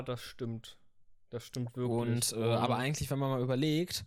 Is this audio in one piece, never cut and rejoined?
yes; 0 cuts

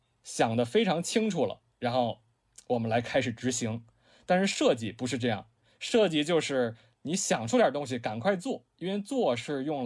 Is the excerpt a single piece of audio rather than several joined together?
yes; 0 cuts

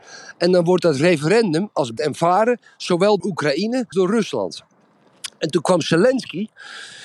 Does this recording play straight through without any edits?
no; 3 cuts; at 2.0 s, 3.2 s, 3.9 s

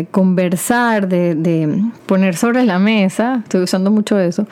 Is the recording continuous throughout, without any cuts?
no; 1 cut; at 2.0 s

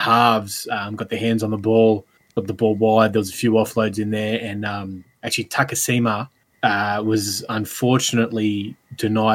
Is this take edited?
no; 0 cuts

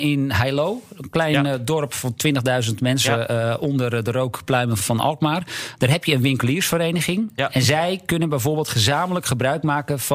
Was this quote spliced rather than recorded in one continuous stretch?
yes; 1 cut; at 4.8 s

